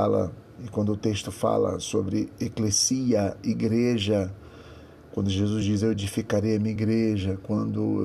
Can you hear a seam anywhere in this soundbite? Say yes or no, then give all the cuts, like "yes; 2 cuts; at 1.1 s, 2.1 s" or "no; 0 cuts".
no; 0 cuts